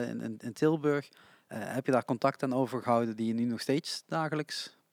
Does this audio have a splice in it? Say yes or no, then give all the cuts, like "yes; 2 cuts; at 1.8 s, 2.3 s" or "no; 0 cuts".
no; 0 cuts